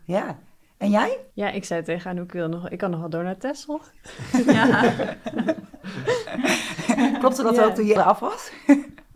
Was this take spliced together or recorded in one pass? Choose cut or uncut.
cut